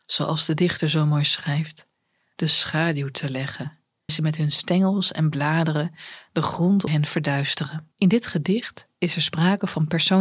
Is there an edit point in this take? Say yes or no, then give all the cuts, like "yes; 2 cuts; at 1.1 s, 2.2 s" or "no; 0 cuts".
yes; 3 cuts; at 4.1 s, 6.9 s, 7.9 s